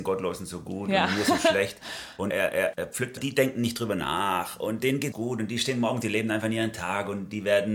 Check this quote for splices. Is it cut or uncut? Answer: cut